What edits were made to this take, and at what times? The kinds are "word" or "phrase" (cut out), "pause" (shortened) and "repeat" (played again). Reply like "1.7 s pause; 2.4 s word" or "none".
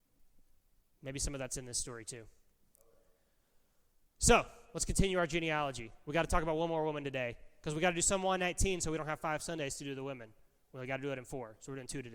none